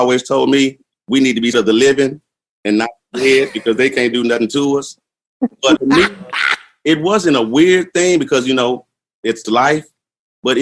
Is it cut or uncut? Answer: cut